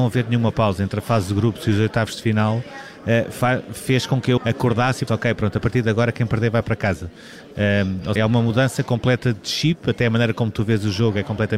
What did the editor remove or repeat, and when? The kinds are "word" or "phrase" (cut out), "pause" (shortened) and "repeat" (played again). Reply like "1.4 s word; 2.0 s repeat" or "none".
4.4 s word; 5.1 s word; 8.2 s phrase